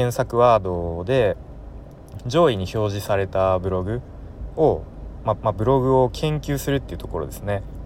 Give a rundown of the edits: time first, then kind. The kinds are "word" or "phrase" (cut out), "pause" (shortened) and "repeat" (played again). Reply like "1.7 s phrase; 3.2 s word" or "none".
5.4 s repeat